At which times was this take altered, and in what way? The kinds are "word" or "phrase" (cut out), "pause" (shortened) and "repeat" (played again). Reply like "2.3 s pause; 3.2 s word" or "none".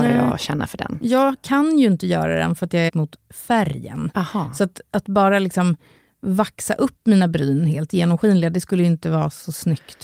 2.9 s phrase

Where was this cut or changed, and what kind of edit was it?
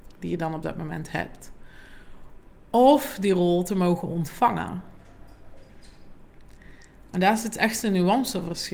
none

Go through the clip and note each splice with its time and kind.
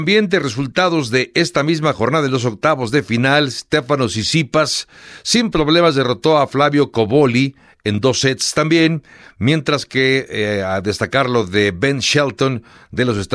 none

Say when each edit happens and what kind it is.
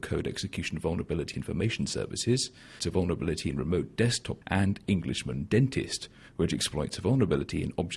1.3 s phrase; 2.8 s phrase; 4.4 s word

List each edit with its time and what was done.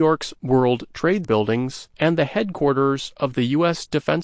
1.2 s word; 1.9 s pause

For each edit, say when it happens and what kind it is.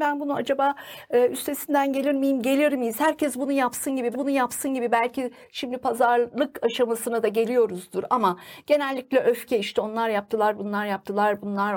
4.1 s repeat

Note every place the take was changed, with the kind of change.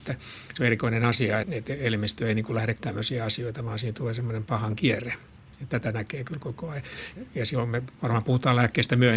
1.4 s word; 2.8 s word

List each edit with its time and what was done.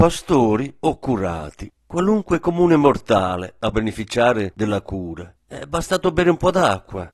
1.8 s pause; 3.7 s word; 5.4 s pause

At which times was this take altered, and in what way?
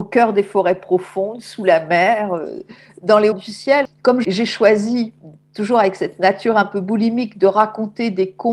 3.3 s word

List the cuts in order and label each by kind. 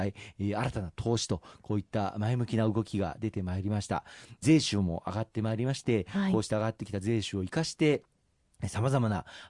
none

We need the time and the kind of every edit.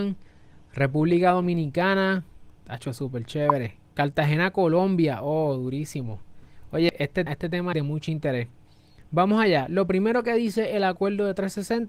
3.8 s pause; 7.3 s word; 7.7 s phrase

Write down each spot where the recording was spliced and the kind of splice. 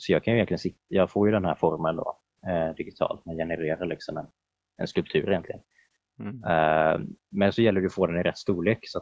none

